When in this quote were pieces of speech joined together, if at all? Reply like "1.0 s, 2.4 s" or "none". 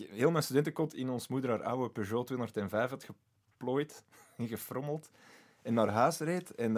none